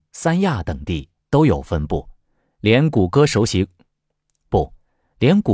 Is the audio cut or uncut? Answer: uncut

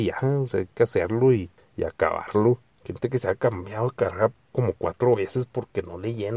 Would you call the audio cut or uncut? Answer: uncut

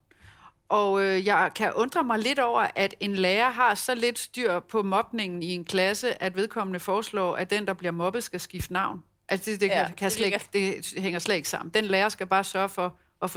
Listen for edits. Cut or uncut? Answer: uncut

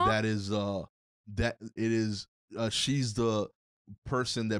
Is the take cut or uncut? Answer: cut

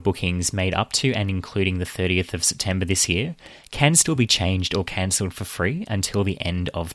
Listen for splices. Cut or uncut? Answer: uncut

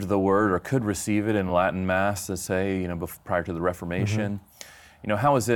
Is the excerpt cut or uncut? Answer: uncut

